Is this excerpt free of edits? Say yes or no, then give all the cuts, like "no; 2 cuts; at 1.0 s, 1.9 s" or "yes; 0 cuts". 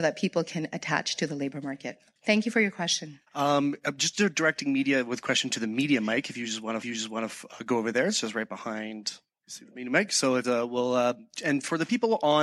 no; 4 cuts; at 2.2 s, 3.3 s, 6.8 s, 10.4 s